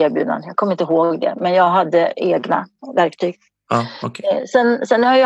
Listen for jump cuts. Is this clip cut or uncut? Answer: uncut